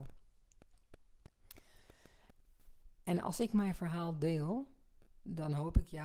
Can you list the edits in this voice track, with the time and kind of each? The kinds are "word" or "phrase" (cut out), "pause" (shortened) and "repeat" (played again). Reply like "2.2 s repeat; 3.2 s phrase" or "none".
none